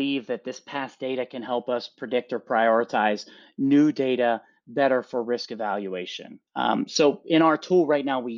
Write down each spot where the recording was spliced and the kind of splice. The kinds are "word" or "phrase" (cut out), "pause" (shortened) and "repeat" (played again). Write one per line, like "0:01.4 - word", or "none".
0:06.5 - pause